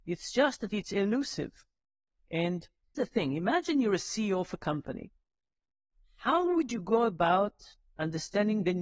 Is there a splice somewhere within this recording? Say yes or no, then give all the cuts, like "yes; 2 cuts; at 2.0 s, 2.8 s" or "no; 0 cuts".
yes; 1 cut; at 3.0 s